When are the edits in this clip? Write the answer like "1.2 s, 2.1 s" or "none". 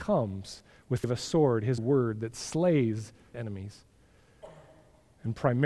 1.0 s, 1.8 s, 3.3 s